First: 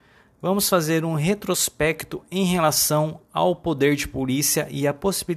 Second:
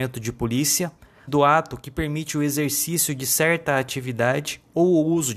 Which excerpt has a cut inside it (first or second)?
second